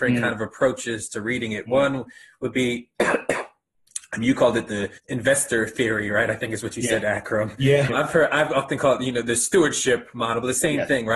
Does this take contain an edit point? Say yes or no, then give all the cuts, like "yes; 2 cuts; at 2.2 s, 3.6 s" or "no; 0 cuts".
yes; 2 cuts; at 5.0 s, 7.9 s